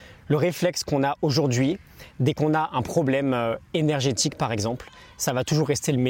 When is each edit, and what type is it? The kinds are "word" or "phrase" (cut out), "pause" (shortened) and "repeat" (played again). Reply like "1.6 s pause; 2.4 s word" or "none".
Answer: none